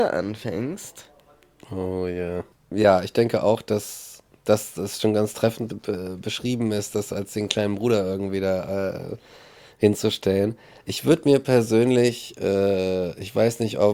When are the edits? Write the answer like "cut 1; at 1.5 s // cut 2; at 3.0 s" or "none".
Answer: cut 1; at 5.7 s